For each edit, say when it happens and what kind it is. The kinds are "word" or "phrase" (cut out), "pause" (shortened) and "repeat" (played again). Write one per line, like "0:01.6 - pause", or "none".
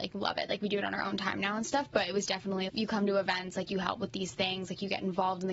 0:02.7 - word